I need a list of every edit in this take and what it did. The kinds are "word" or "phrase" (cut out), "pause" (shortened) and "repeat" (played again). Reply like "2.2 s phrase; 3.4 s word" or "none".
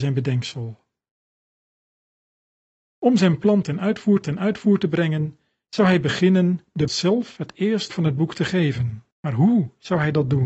4.2 s repeat; 6.9 s phrase; 7.9 s word; 9.1 s pause